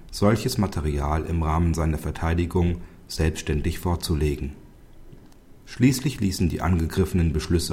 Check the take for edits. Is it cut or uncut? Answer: uncut